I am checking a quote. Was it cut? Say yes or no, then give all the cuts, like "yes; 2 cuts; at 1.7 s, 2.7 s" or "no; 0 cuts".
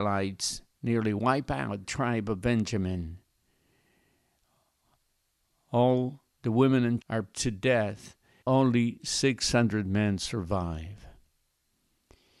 yes; 4 cuts; at 1.8 s, 7.0 s, 7.3 s, 8.4 s